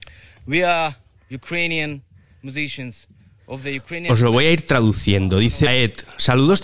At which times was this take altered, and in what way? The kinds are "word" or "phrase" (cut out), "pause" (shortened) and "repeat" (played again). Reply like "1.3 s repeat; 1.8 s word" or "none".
5.7 s word